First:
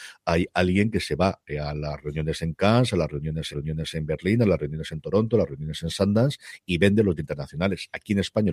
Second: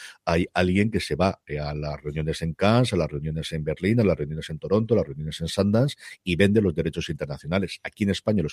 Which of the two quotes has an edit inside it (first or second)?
first